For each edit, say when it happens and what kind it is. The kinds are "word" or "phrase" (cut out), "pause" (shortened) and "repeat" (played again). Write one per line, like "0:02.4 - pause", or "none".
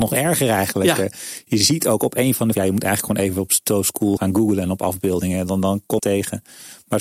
0:02.5 - word
0:04.2 - word
0:06.0 - phrase